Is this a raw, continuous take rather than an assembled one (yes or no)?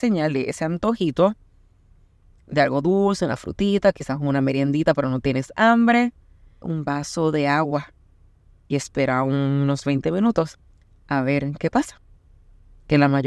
no